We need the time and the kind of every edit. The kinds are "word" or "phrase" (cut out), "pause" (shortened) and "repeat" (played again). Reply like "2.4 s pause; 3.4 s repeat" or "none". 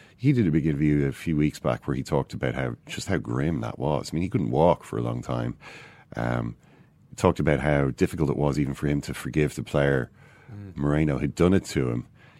none

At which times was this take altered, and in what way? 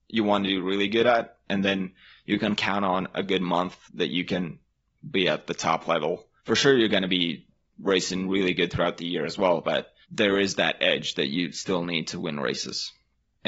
3.8 s pause; 6.4 s pause; 10.0 s pause

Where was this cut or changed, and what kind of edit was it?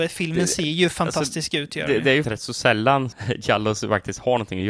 2.2 s word; 3.1 s word

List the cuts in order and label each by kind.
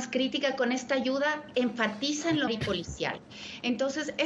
1.5 s word; 2.5 s word

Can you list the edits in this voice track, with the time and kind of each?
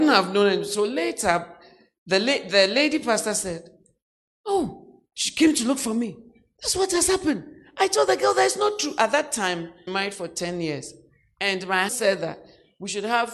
9.9 s phrase; 11.9 s word

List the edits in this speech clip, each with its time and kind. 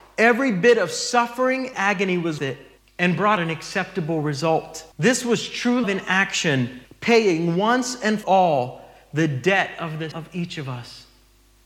1.7 s word; 2.4 s word; 2.8 s pause; 3.4 s word; 4.9 s pause; 5.8 s word; 6.8 s pause; 8.2 s word; 10.1 s word

